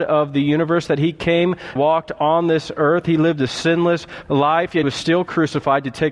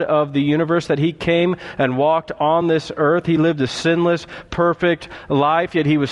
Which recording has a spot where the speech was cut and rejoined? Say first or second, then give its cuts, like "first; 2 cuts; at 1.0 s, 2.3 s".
first; 3 cuts; at 1.8 s, 4.3 s, 4.8 s